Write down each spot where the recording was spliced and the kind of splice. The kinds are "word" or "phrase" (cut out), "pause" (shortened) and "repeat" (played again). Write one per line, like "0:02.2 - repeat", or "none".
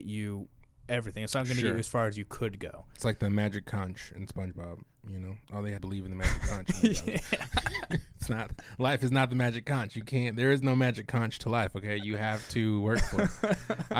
0:05.4 - pause
0:05.8 - phrase